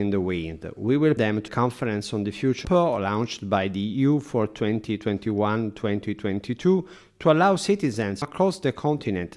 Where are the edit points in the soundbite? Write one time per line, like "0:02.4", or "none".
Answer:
0:01.2
0:01.5
0:02.6
0:08.2